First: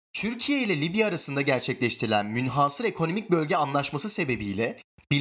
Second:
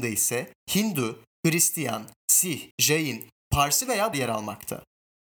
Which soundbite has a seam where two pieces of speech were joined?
second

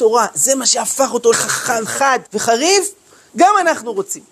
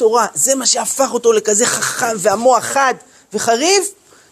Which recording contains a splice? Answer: first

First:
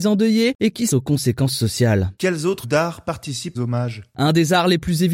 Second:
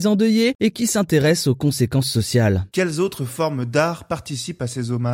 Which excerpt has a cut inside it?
first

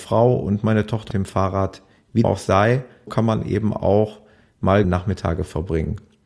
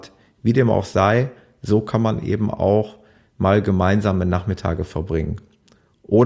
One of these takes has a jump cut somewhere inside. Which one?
first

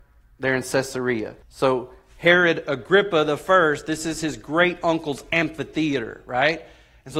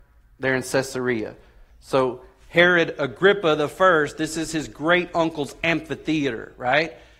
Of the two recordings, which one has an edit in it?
first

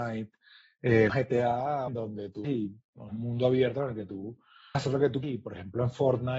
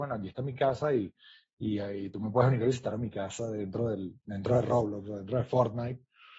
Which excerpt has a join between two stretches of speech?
first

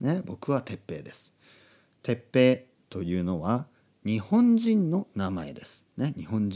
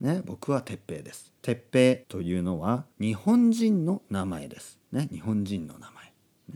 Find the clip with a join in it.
second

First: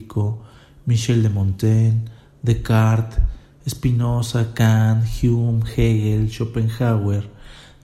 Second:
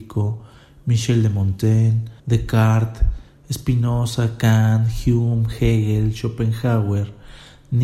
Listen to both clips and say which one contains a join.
second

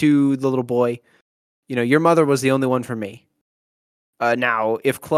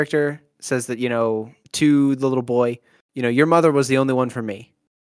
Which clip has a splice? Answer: second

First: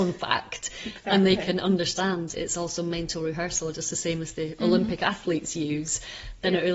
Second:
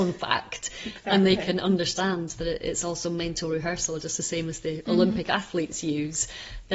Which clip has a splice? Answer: first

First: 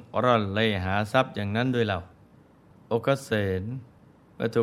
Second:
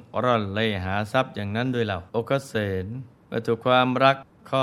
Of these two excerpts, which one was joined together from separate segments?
second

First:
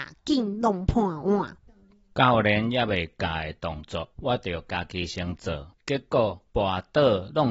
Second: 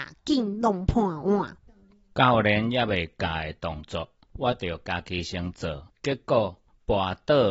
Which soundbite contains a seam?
first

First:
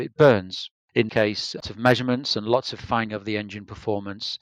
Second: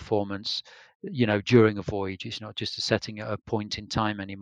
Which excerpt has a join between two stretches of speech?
first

